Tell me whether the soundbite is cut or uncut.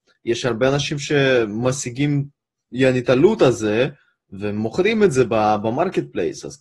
uncut